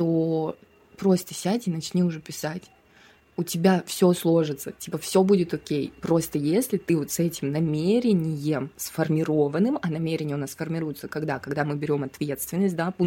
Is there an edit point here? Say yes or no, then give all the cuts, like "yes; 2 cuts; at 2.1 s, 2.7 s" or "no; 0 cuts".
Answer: no; 0 cuts